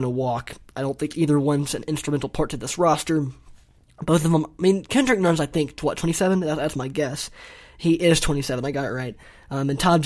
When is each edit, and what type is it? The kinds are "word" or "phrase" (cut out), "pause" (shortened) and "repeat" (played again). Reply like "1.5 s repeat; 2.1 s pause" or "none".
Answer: none